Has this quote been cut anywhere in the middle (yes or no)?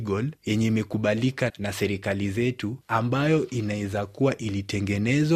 yes